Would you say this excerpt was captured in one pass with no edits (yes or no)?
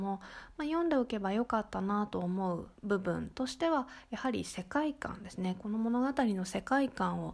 no